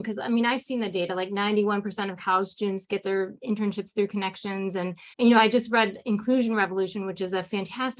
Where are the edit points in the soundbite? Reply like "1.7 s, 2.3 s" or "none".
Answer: 5.1 s